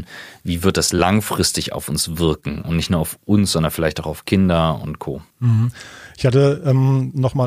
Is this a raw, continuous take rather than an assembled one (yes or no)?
no